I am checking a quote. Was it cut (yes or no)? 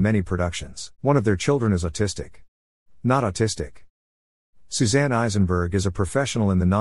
yes